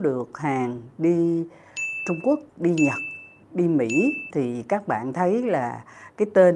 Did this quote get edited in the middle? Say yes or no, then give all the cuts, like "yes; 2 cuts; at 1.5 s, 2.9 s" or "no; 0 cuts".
yes; 2 cuts; at 2.5 s, 4.3 s